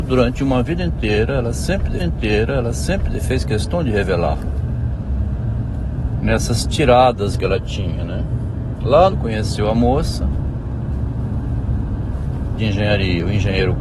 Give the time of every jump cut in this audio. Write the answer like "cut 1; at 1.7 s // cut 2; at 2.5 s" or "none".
cut 1; at 2.0 s // cut 2; at 7.3 s // cut 3; at 9.1 s // cut 4; at 12.6 s